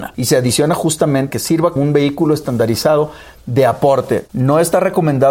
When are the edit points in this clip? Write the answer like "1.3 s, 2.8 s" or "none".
1.3 s, 1.8 s